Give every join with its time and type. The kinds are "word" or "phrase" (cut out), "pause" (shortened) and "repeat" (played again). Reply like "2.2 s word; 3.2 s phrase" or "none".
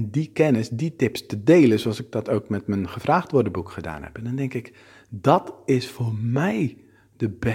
none